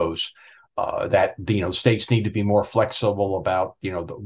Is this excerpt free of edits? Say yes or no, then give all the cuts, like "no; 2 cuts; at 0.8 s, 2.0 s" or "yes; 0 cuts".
yes; 0 cuts